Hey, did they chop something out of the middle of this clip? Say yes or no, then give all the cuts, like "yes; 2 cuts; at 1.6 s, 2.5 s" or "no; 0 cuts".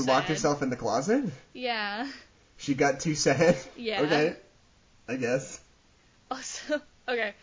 no; 0 cuts